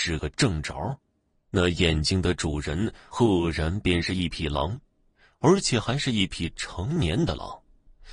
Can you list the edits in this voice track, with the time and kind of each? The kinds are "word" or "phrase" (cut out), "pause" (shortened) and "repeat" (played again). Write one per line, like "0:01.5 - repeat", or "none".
none